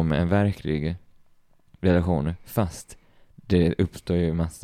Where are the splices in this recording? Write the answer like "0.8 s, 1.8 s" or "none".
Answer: none